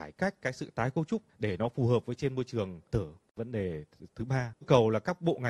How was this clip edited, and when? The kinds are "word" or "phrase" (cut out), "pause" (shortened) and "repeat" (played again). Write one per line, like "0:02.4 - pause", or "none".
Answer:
0:01.3 - pause
0:02.9 - word
0:04.6 - word